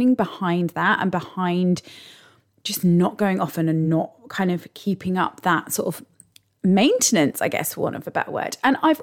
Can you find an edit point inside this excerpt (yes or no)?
no